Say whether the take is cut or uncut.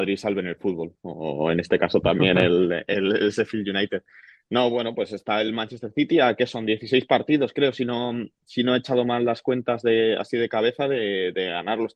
uncut